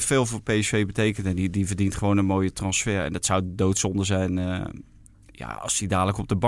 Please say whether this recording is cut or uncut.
uncut